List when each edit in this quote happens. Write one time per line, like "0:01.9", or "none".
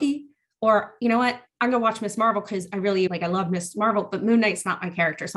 0:03.1